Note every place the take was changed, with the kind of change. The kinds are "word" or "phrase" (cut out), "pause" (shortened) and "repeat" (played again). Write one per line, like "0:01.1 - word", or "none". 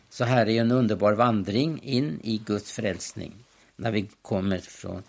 none